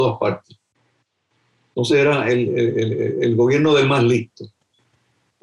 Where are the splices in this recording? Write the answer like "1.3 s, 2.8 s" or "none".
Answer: none